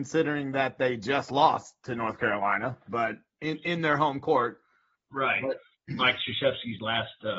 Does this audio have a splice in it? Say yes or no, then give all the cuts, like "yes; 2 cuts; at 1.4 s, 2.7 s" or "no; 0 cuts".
no; 0 cuts